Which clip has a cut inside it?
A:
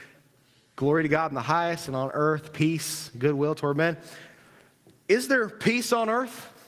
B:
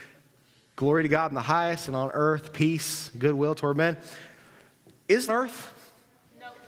B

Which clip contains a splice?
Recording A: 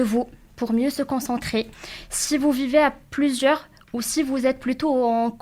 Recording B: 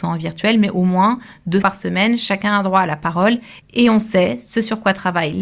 B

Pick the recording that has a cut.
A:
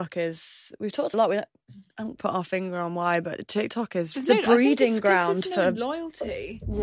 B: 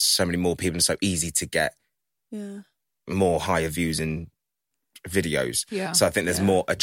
A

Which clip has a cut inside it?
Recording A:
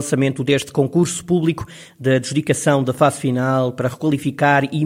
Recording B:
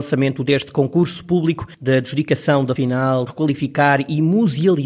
B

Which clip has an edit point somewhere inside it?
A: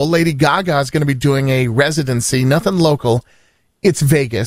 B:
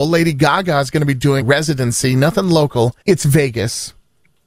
B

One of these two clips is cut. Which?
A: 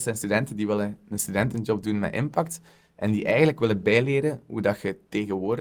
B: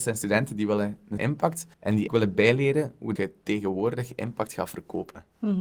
B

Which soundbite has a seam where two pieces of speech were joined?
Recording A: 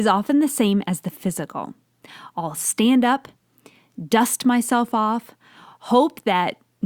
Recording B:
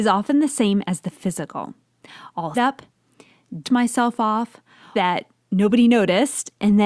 B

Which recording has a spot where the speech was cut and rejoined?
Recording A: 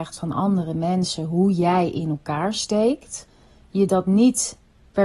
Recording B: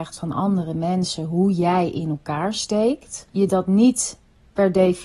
B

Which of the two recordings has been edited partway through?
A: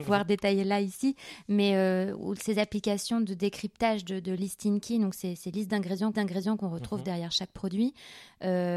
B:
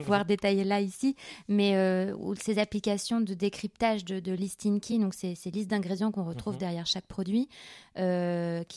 A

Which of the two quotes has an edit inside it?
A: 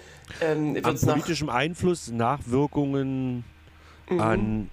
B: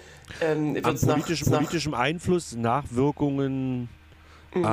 B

